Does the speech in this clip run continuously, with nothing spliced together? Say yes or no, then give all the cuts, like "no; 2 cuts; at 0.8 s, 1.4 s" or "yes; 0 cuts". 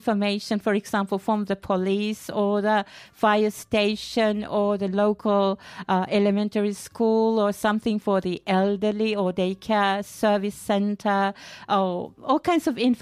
yes; 0 cuts